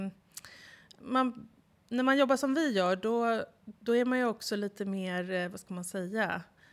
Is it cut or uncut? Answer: cut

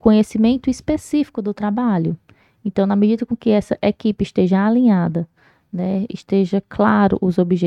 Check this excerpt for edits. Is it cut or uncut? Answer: uncut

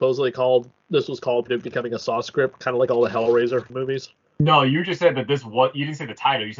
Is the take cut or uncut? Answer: cut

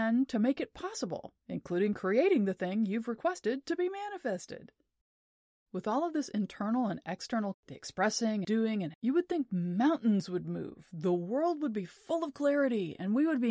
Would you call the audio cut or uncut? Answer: cut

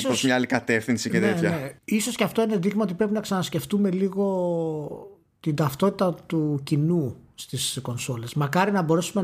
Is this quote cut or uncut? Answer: cut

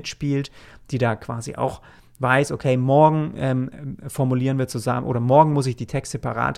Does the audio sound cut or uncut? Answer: uncut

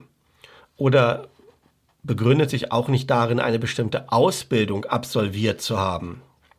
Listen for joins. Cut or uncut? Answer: uncut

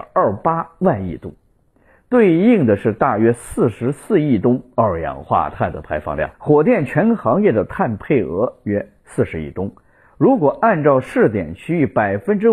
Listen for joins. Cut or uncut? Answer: cut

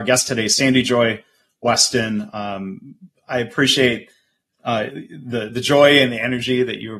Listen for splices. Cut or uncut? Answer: cut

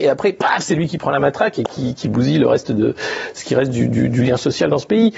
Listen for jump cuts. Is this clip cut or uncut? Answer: uncut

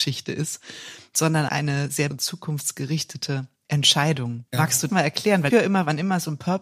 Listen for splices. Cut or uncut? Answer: cut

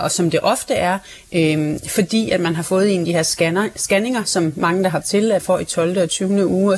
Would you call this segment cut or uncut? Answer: cut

